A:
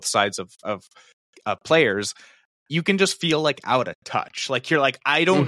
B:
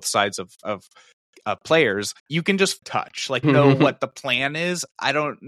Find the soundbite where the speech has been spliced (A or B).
B